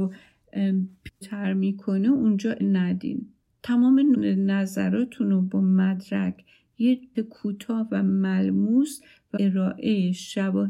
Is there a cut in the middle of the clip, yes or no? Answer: yes